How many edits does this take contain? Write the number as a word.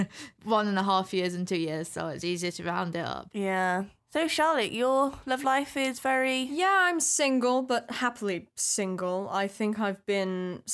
two